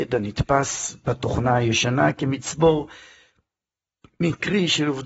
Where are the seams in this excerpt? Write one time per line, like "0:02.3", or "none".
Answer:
none